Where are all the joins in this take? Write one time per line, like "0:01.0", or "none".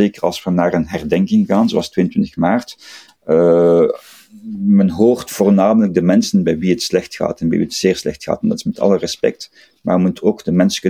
none